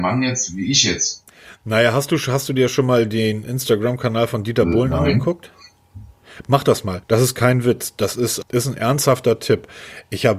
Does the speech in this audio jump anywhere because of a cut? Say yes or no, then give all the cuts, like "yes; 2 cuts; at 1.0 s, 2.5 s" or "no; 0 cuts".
yes; 2 cuts; at 7.0 s, 8.4 s